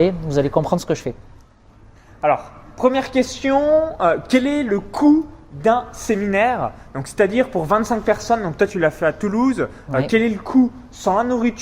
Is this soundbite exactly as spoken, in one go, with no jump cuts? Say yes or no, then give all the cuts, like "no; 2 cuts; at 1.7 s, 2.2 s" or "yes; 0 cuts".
yes; 0 cuts